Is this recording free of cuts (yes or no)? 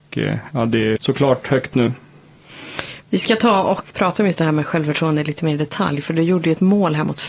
no